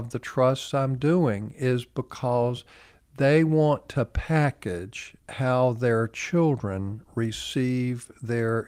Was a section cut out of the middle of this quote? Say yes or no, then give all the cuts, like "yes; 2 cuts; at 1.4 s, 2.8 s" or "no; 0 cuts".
yes; 1 cut; at 5.2 s